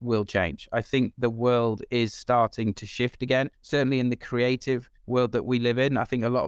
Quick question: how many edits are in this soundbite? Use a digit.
2